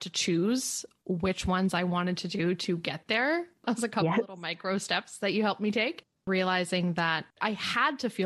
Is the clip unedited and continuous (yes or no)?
yes